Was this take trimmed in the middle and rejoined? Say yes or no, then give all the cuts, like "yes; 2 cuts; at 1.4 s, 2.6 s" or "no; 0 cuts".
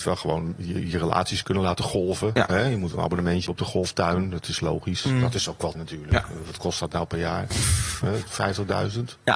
yes; 2 cuts; at 3.5 s, 5.7 s